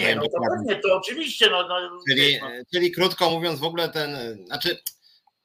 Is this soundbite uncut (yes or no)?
yes